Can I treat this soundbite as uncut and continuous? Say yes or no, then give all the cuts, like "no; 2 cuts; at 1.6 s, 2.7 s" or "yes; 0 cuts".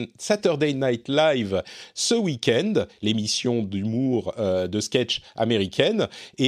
yes; 0 cuts